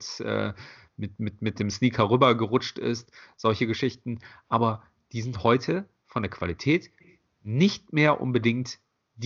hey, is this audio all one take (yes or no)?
yes